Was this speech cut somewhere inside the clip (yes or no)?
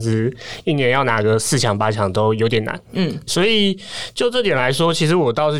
yes